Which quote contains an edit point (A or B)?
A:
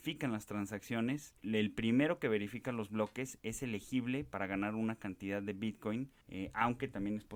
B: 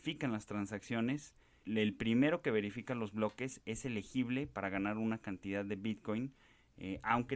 A